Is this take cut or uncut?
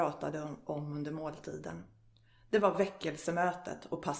uncut